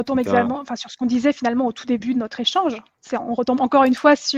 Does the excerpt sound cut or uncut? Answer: uncut